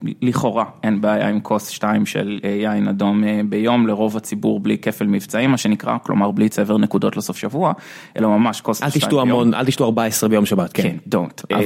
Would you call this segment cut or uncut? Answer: uncut